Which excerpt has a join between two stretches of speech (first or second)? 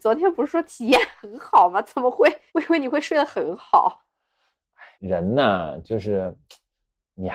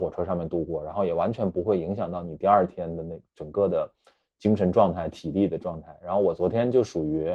first